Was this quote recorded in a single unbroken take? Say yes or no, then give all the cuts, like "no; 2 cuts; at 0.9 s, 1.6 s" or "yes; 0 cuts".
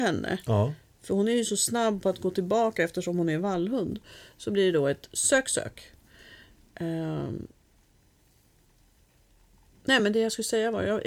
yes; 0 cuts